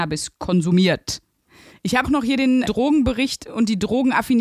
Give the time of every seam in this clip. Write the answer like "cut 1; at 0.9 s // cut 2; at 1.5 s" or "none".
cut 1; at 2.0 s // cut 2; at 2.6 s